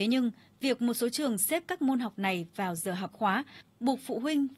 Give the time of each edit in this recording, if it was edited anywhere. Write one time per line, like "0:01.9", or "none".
0:03.1

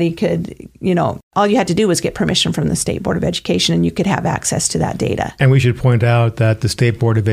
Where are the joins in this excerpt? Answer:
none

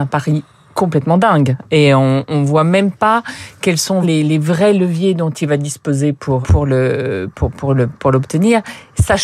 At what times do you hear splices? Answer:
0:04.0
0:06.4

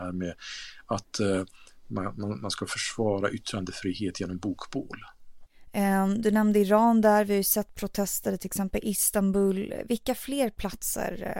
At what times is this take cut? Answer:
none

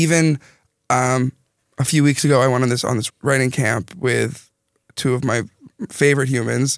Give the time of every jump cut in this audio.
0:03.1

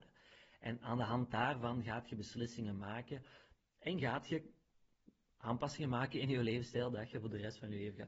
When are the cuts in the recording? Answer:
none

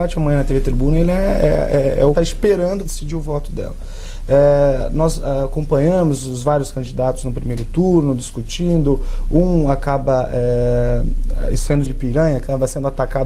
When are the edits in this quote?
0:02.1
0:02.8
0:11.8

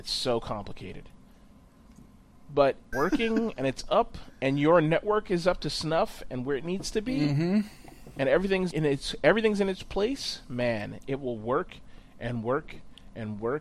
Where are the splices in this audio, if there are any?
0:02.9
0:08.7

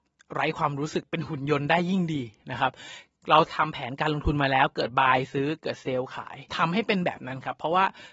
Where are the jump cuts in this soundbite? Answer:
0:06.5

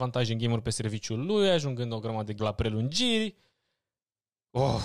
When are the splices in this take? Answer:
0:02.4

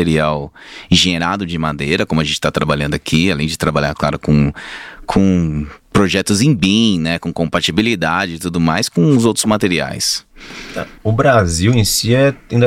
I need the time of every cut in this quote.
0:05.8
0:11.0

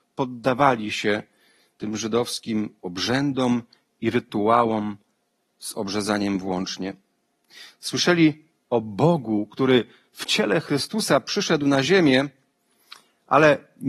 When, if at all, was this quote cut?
none

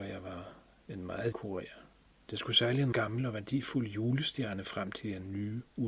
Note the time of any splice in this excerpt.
0:01.3
0:02.9

